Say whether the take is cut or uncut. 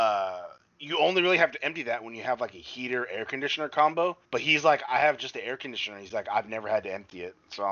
cut